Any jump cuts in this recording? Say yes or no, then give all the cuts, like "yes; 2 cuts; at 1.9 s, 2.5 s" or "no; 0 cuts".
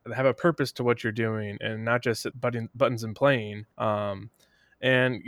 yes; 2 cuts; at 2.3 s, 3.7 s